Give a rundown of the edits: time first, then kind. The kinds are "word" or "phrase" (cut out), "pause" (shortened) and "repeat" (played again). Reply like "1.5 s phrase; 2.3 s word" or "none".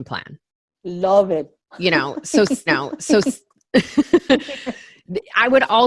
2.7 s repeat